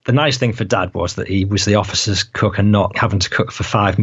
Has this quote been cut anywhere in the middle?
yes; 1 cut; at 2.9 s

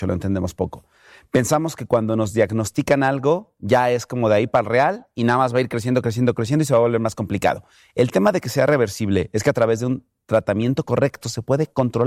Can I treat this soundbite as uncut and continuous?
yes; 0 cuts

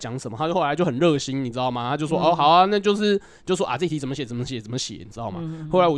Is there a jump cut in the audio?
no; 0 cuts

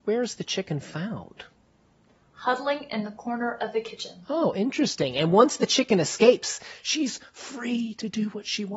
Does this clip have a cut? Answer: no; 0 cuts

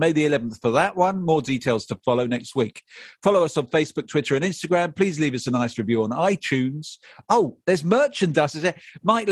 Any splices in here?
no; 0 cuts

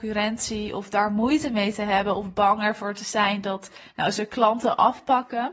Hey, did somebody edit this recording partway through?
no; 0 cuts

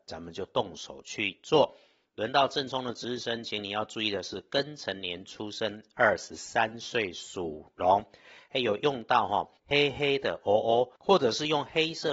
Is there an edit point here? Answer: yes; 2 cuts; at 9.6 s, 11.0 s

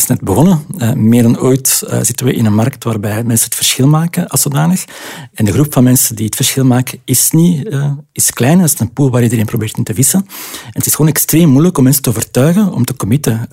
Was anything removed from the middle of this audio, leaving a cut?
no; 0 cuts

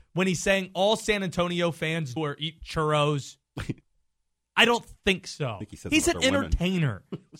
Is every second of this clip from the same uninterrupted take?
no; 2 cuts; at 2.2 s, 3.8 s

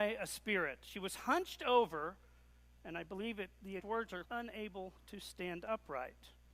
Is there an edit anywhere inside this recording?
yes; 3 cuts; at 3.8 s, 4.2 s, 5.0 s

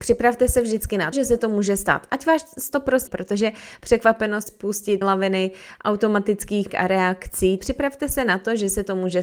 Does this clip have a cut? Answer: yes; 6 cuts; at 1.1 s, 3.1 s, 4.5 s, 5.0 s, 6.7 s, 7.6 s

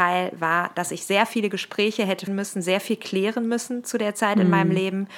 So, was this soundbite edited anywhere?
yes; 1 cut; at 2.3 s

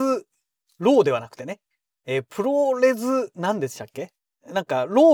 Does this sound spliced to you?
no; 0 cuts

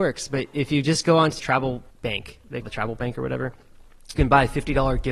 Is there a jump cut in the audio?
yes; 4 cuts; at 1.4 s, 1.9 s, 2.6 s, 4.1 s

